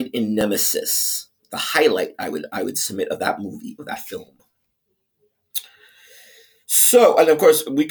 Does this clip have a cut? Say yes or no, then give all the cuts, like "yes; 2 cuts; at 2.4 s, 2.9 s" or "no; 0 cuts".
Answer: no; 0 cuts